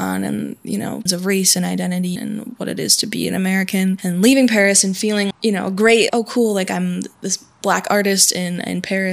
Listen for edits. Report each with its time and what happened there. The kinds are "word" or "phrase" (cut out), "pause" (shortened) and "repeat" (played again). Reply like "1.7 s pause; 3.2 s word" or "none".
1.1 s word; 2.2 s word; 5.3 s word; 6.1 s word